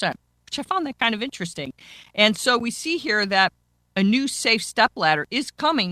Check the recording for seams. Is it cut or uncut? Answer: uncut